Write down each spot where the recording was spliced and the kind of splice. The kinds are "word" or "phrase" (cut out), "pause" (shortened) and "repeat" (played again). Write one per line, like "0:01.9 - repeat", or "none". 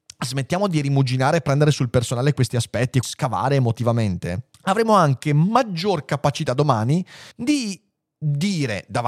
0:03.0 - word
0:04.5 - pause
0:07.3 - pause